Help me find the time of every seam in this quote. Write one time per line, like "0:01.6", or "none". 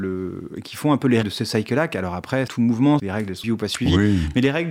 0:01.2
0:02.5
0:03.0
0:03.4